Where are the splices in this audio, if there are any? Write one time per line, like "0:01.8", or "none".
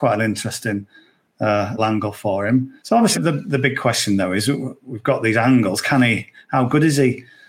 0:01.8
0:02.8
0:03.1